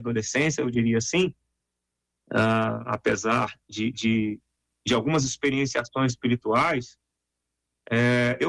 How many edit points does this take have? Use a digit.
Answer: 0